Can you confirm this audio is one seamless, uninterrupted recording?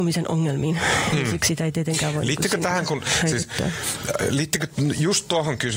yes; 0 cuts

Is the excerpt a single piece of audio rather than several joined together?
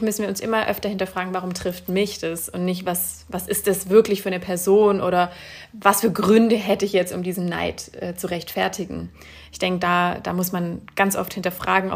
yes; 0 cuts

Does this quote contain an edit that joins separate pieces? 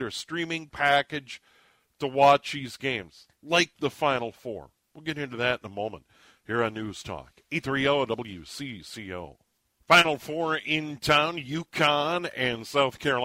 no; 0 cuts

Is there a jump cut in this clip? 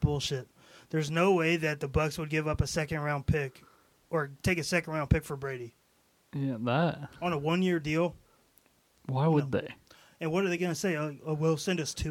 no; 0 cuts

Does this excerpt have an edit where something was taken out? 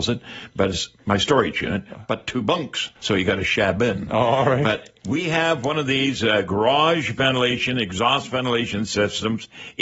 yes; 1 cut; at 2.9 s

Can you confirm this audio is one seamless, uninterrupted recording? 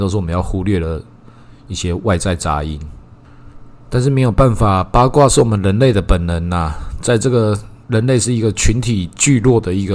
no; 1 cut; at 7.8 s

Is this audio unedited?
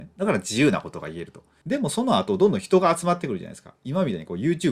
yes; 0 cuts

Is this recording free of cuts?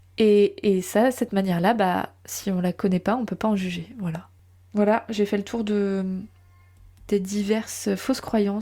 yes; 0 cuts

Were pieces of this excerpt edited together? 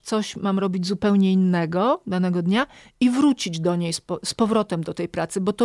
no; 0 cuts

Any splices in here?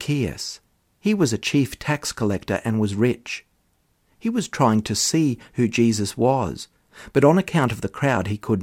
no; 0 cuts

